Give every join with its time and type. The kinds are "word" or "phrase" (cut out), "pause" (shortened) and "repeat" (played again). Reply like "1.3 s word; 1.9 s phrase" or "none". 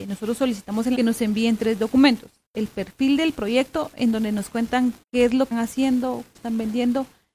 0.9 s phrase; 2.5 s pause; 5.0 s pause; 5.5 s word; 6.3 s word